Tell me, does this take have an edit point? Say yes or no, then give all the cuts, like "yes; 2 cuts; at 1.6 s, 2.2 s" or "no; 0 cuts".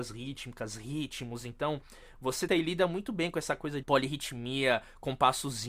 yes; 2 cuts; at 2.5 s, 3.8 s